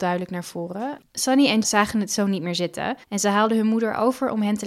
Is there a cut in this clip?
yes; 3 cuts; at 1.1 s, 1.6 s, 3.0 s

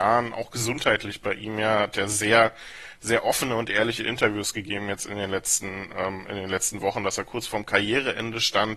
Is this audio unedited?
yes; 0 cuts

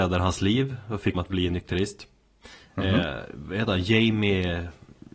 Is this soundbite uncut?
no; 1 cut; at 1.1 s

